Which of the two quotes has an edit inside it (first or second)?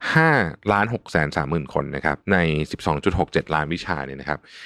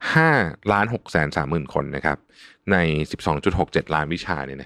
first